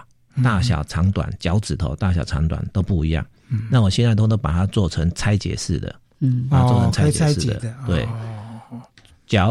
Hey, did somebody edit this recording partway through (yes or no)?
no